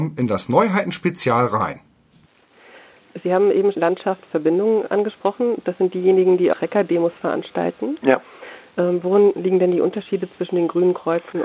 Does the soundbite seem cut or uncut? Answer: cut